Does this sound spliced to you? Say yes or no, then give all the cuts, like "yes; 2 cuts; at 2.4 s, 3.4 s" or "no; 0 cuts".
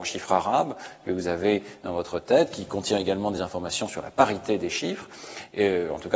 no; 0 cuts